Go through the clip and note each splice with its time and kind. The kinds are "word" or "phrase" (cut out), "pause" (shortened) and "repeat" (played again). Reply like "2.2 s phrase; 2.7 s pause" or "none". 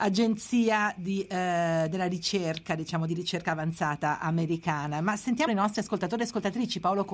3.1 s phrase; 5.5 s word

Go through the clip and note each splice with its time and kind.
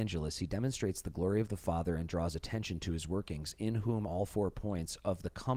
none

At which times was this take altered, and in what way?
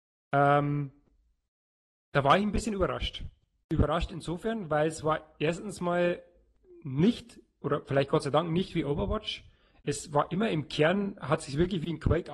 none

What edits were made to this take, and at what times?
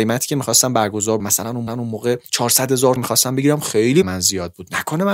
1.2 s word; 1.7 s repeat; 3.0 s word; 4.0 s word

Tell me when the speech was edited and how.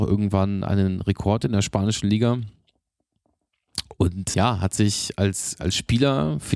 4.3 s word

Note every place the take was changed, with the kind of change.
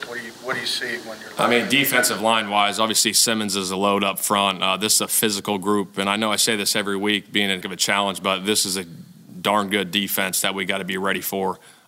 7.6 s word

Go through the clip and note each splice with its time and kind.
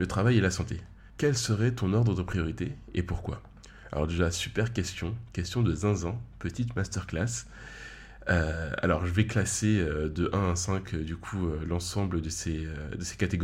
1.1 s pause

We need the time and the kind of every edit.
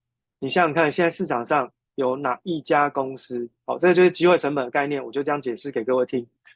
none

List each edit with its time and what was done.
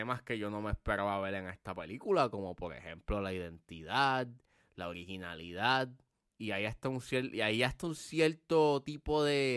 none

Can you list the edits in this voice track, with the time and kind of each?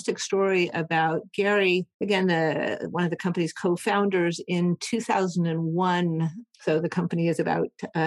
1.9 s pause

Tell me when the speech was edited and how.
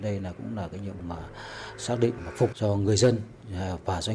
1.0 s word; 2.2 s phrase; 2.5 s word

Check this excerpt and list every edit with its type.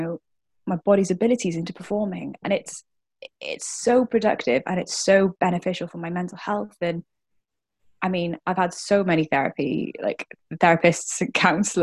none

